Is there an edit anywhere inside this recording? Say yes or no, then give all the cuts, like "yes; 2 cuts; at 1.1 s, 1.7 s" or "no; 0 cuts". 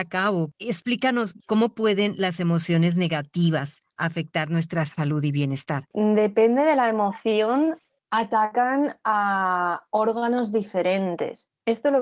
no; 0 cuts